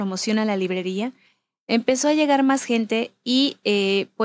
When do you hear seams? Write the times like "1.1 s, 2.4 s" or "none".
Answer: none

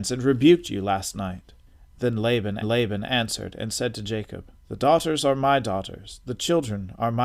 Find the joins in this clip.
1.7 s, 2.6 s, 4.6 s

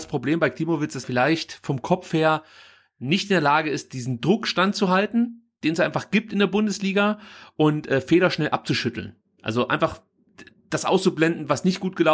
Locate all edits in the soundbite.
1.0 s

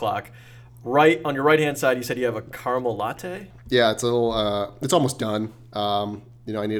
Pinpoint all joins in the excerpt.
none

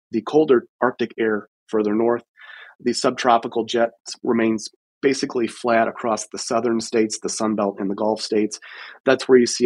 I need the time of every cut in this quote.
none

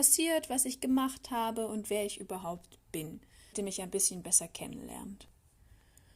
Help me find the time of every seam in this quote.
3.5 s

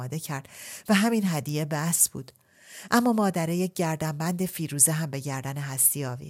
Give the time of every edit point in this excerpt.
none

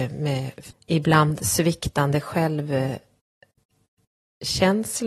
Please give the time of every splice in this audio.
none

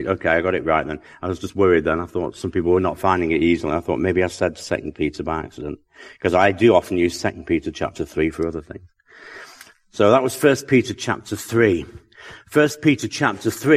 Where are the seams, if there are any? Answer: none

